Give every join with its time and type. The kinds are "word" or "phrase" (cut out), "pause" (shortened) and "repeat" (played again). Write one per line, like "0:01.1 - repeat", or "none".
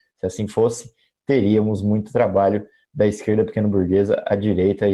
none